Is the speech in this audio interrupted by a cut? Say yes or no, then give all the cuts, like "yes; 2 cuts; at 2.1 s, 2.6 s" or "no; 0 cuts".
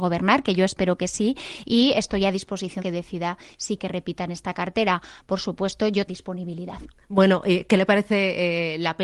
yes; 3 cuts; at 2.8 s, 3.8 s, 6.1 s